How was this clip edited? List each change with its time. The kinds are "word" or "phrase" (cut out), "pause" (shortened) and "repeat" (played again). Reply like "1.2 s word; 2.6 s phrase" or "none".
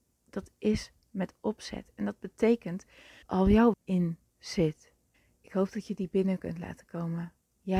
3.2 s word; 3.7 s word; 4.3 s word; 5.1 s pause